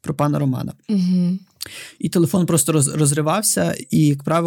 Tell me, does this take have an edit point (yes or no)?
no